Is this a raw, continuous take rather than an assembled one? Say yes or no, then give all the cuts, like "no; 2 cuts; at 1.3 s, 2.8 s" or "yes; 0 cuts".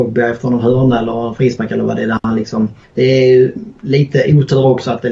yes; 0 cuts